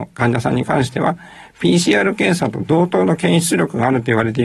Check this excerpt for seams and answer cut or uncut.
uncut